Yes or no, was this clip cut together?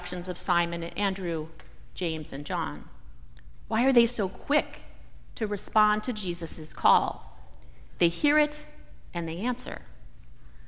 no